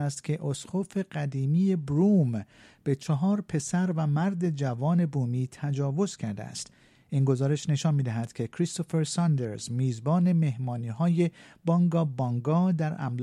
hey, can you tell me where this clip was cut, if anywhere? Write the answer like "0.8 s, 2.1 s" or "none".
none